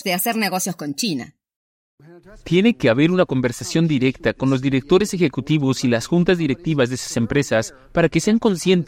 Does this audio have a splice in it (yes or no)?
no